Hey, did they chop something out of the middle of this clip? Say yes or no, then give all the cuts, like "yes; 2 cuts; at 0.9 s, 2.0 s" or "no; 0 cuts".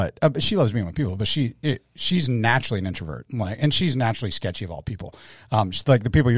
no; 0 cuts